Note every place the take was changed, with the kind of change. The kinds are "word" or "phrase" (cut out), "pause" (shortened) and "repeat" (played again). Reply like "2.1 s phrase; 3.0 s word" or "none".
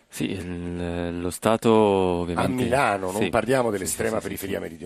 none